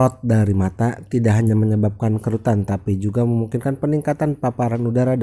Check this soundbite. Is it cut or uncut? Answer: uncut